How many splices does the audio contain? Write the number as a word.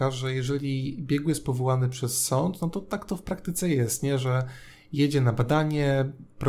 zero